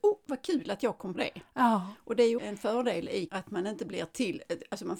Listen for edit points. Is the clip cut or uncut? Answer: cut